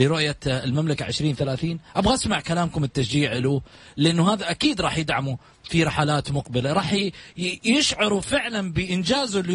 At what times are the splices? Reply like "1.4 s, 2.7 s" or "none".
none